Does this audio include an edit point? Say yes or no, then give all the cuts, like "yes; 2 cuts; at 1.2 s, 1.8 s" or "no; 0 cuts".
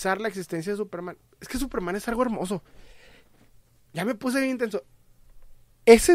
no; 0 cuts